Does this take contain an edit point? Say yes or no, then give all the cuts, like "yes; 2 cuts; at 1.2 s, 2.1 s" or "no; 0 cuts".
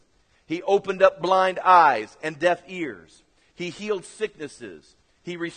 no; 0 cuts